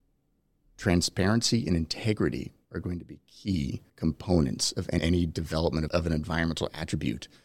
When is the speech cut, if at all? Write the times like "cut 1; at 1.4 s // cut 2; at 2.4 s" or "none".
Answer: cut 1; at 3.9 s